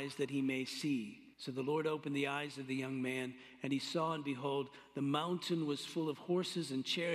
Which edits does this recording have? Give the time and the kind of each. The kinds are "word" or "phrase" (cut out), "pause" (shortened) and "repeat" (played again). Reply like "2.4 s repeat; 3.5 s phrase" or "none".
1.3 s pause